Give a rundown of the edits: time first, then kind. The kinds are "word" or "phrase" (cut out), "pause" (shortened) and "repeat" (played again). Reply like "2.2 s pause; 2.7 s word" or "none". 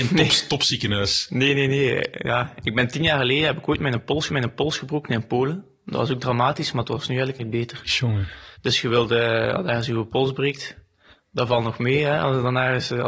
4.3 s repeat; 7.4 s word; 8.5 s pause; 11.1 s pause